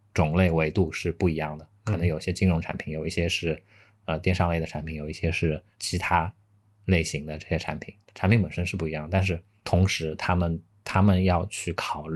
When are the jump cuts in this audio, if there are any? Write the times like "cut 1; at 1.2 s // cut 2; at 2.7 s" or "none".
none